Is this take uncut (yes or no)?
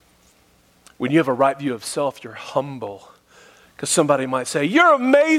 yes